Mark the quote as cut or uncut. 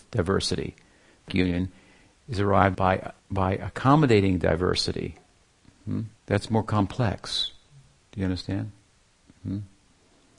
cut